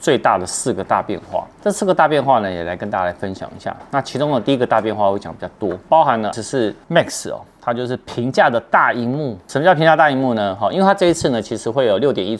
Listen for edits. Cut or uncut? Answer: cut